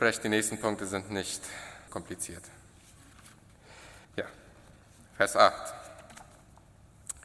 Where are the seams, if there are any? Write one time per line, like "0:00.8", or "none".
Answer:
0:01.9
0:04.0